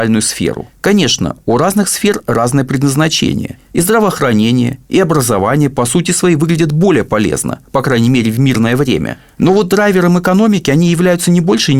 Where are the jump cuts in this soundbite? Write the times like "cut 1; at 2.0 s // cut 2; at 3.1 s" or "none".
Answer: none

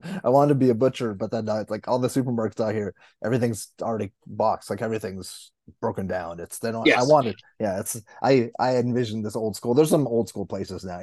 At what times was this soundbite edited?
none

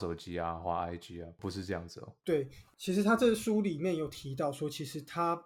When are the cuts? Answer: cut 1; at 2.2 s

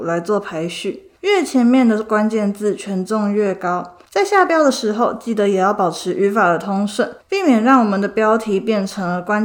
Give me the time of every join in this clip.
cut 1; at 1.2 s // cut 2; at 4.1 s // cut 3; at 7.2 s

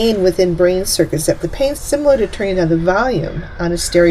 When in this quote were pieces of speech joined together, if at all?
cut 1; at 1.4 s // cut 2; at 1.7 s

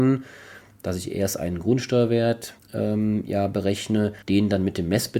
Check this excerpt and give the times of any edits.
cut 1; at 2.6 s // cut 2; at 4.2 s

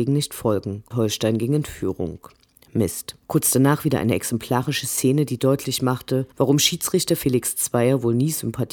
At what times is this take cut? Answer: cut 1; at 0.9 s // cut 2; at 3.2 s // cut 3; at 6.3 s

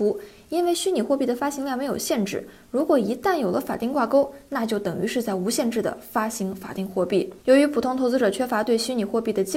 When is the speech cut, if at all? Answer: cut 1; at 7.4 s

